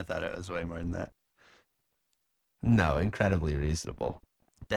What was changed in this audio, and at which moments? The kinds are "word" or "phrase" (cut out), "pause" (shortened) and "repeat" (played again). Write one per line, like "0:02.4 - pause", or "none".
none